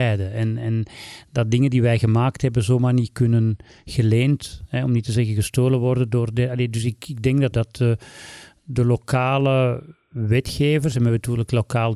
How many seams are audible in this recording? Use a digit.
1